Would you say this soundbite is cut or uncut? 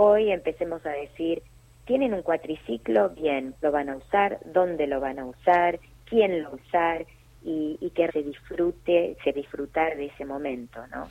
cut